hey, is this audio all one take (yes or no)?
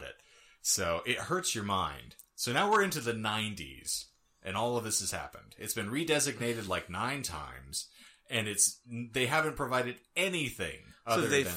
yes